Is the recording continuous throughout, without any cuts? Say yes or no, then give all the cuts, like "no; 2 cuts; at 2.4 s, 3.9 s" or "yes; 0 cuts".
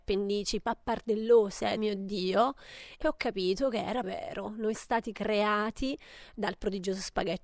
no; 4 cuts; at 1.8 s, 3.0 s, 4.0 s, 4.7 s